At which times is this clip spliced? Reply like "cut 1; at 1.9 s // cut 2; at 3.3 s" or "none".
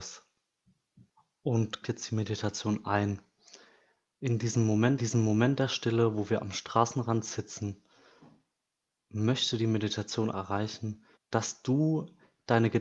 cut 1; at 1.8 s // cut 2; at 5.0 s // cut 3; at 10.3 s // cut 4; at 11.1 s